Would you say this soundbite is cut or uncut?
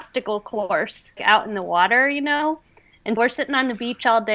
cut